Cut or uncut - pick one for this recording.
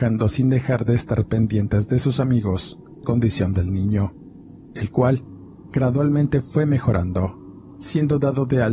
cut